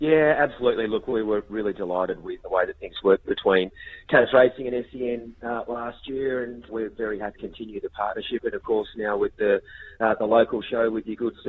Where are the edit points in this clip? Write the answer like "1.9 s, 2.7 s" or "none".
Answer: 2.4 s, 6.7 s, 7.4 s